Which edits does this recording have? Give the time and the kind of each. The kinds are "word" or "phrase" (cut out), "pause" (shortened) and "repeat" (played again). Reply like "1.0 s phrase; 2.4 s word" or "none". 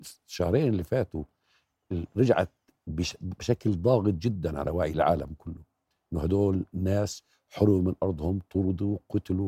none